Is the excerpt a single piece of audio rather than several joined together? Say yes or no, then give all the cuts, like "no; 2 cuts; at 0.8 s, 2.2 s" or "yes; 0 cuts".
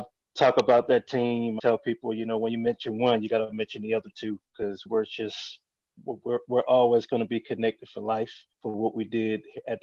no; 3 cuts; at 1.6 s, 4.9 s, 8.5 s